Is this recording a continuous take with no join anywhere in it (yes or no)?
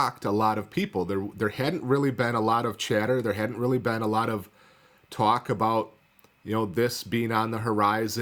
yes